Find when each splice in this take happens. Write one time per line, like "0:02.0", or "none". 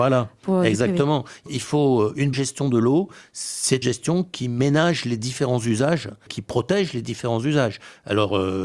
0:01.5
0:02.3
0:03.8
0:06.3